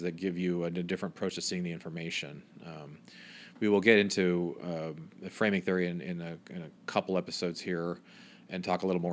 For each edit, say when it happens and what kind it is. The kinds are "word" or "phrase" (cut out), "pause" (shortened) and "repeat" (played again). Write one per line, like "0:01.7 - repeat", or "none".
0:06.8 - pause